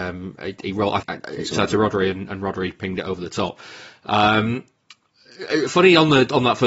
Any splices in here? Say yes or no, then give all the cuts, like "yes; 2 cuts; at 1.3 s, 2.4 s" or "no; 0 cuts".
yes; 2 cuts; at 1.0 s, 1.5 s